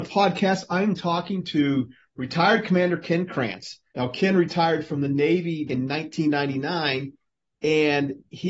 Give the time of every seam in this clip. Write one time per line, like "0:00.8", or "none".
0:03.9
0:05.7